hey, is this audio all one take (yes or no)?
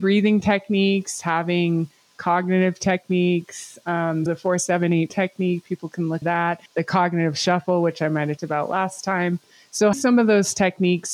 no